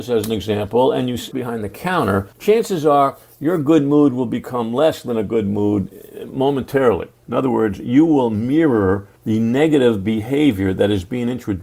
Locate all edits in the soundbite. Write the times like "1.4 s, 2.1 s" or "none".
1.3 s, 2.3 s, 7.2 s, 9.2 s